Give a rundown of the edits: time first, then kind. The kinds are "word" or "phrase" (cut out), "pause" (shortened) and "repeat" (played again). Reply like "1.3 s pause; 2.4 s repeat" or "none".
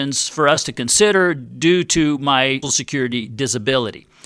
2.6 s word

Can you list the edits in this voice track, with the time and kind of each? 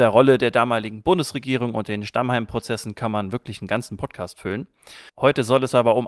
5.1 s pause

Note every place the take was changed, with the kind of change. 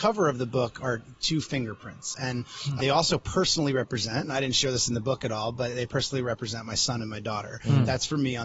2.8 s word

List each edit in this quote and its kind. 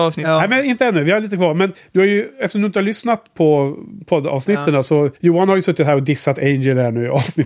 5.2 s pause

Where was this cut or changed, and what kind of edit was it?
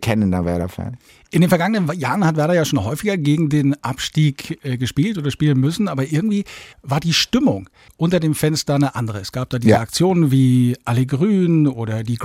none

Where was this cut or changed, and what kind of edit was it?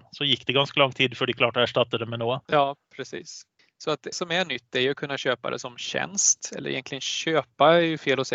2.4 s pause; 3.6 s pause; 4.1 s word

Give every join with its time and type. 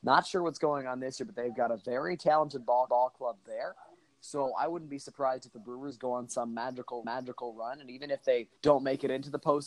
2.9 s repeat; 7.0 s repeat; 8.6 s pause

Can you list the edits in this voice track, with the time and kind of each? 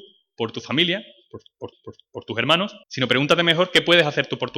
1.7 s repeat; 2.8 s pause

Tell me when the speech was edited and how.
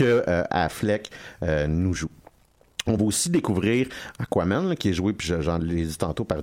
none

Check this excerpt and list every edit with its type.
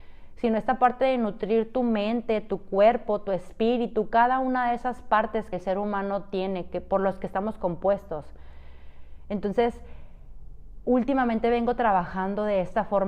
5.5 s word

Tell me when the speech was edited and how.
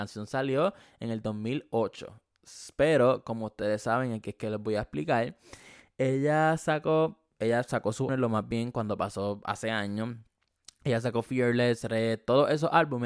8.1 s word

